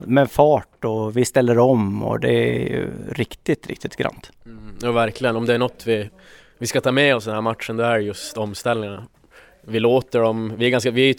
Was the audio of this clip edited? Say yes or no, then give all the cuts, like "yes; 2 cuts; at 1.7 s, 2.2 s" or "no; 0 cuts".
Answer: no; 0 cuts